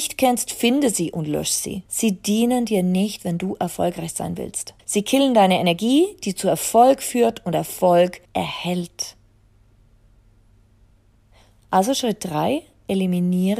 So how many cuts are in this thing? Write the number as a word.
three